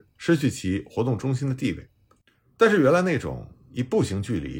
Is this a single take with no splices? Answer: yes; 0 cuts

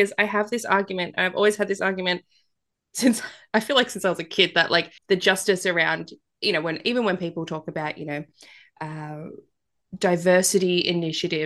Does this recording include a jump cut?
yes; 1 cut; at 5.0 s

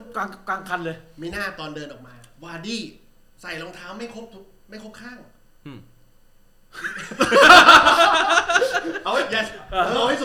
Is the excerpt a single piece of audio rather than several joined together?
yes; 0 cuts

